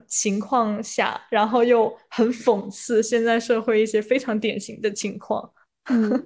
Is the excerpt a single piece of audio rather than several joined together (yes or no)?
yes